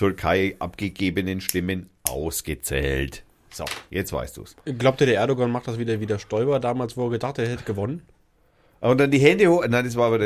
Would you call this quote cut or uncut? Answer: uncut